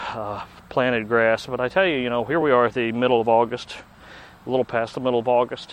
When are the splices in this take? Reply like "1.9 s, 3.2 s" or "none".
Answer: none